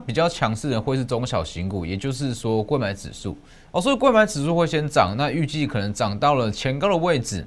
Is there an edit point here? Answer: yes; 1 cut; at 3.5 s

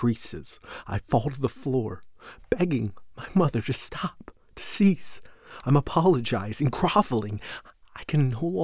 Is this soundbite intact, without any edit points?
yes; 0 cuts

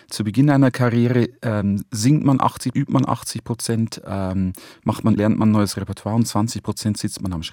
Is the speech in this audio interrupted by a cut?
yes; 2 cuts; at 2.7 s, 5.2 s

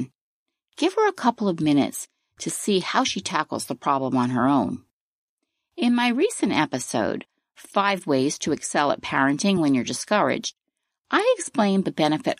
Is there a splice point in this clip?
no; 0 cuts

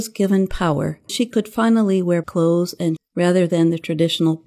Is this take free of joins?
no; 3 cuts; at 1.1 s, 2.2 s, 3.0 s

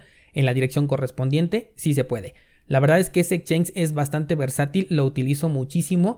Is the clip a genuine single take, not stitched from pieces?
yes; 0 cuts

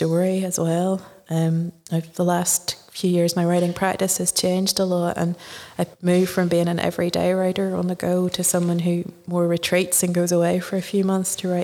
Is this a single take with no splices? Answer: no; 1 cut; at 5.9 s

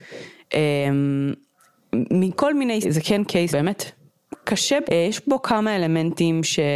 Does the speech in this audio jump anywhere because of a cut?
yes; 3 cuts; at 2.8 s, 3.5 s, 4.8 s

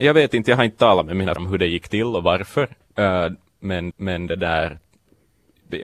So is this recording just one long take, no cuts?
no; 2 cuts; at 1.4 s, 3.9 s

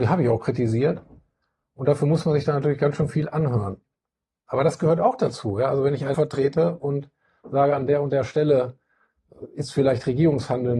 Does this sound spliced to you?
yes; 1 cut; at 6.1 s

